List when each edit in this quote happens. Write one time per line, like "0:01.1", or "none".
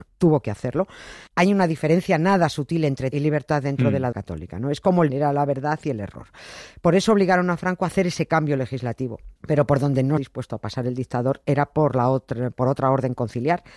0:01.3
0:03.1
0:04.1
0:05.1
0:09.4
0:10.2